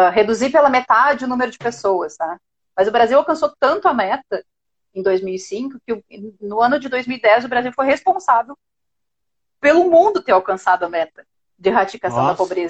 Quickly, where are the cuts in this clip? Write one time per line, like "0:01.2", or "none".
none